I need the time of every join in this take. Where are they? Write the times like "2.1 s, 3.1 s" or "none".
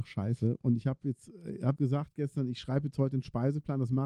1.8 s